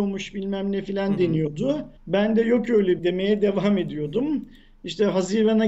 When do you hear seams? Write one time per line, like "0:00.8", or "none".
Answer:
0:02.0
0:03.0